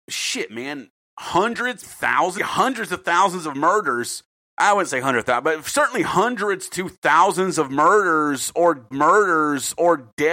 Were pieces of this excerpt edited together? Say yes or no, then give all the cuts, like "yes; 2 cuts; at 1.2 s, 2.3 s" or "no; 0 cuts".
yes; 4 cuts; at 1.8 s, 2.4 s, 4.4 s, 8.9 s